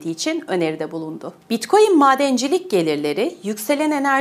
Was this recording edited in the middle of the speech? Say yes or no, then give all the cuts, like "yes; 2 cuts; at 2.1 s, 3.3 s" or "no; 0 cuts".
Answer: yes; 1 cut; at 1.4 s